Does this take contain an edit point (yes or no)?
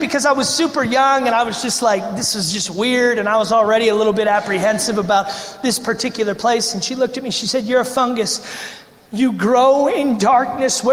no